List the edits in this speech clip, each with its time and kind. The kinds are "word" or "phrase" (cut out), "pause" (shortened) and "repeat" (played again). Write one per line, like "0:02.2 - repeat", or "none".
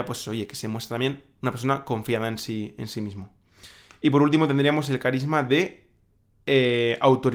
none